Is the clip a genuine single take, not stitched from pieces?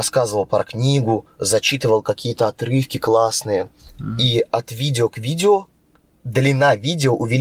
yes; 0 cuts

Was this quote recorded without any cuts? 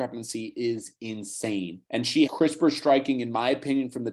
no; 2 cuts; at 1.9 s, 2.3 s

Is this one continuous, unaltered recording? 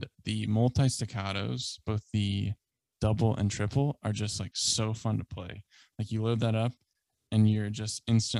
yes; 0 cuts

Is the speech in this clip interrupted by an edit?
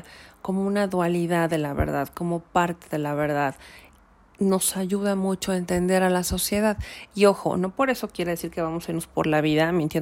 no; 0 cuts

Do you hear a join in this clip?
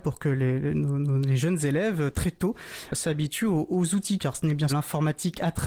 yes; 1 cut; at 4.7 s

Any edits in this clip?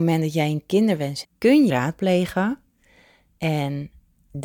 yes; 2 cuts; at 1.2 s, 1.7 s

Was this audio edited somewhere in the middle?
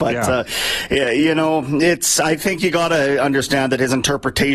no; 0 cuts

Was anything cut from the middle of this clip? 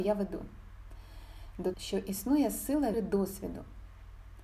yes; 2 cuts; at 1.7 s, 2.9 s

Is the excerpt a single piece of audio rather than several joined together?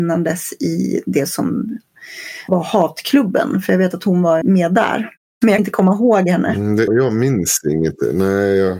no; 4 cuts; at 2.5 s, 4.4 s, 5.6 s, 6.9 s

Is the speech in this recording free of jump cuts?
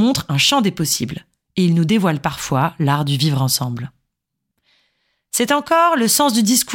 yes; 0 cuts

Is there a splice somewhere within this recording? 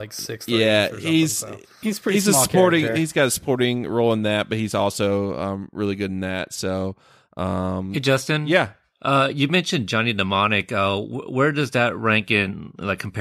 no; 0 cuts

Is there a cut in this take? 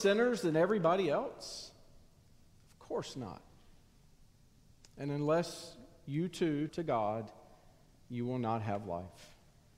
yes; 1 cut; at 6.7 s

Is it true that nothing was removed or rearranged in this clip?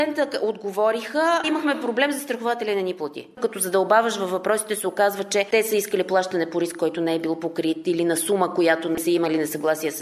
no; 1 cut; at 1.4 s

